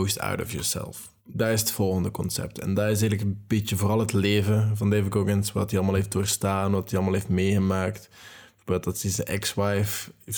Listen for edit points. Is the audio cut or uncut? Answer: cut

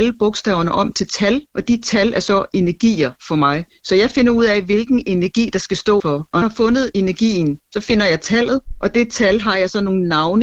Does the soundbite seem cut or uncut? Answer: cut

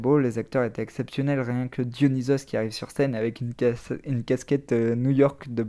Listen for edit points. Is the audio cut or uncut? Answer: uncut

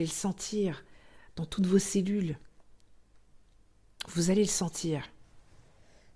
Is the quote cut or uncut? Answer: uncut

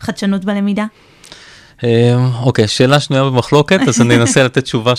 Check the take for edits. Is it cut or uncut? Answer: uncut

